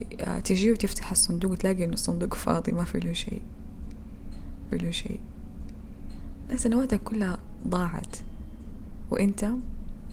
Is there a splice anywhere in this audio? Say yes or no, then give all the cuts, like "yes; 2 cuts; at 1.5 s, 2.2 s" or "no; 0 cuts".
yes; 1 cut; at 4.7 s